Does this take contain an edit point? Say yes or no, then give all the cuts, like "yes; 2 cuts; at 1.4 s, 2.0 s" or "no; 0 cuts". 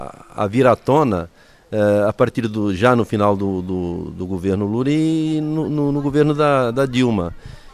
no; 0 cuts